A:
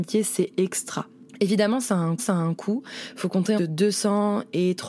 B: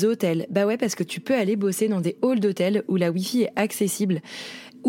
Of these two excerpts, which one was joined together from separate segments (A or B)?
A